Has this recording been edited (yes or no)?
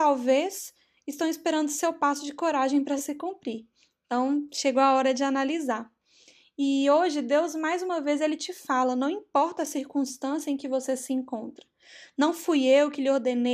no